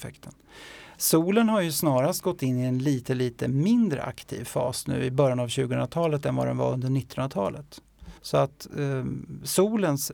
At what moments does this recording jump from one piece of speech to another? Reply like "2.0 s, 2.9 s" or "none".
8.2 s

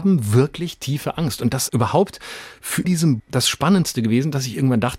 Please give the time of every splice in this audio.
1.7 s, 2.8 s, 3.2 s

